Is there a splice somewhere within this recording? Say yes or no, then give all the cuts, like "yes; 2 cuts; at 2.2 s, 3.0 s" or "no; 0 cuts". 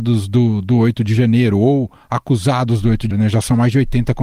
yes; 1 cut; at 3.1 s